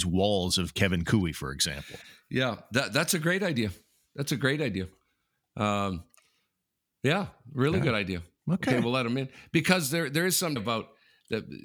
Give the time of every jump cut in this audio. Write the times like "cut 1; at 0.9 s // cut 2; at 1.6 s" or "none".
cut 1; at 10.6 s